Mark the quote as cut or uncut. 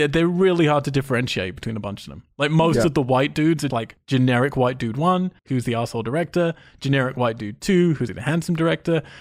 cut